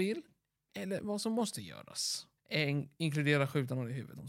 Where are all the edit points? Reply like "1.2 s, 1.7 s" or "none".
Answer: 2.4 s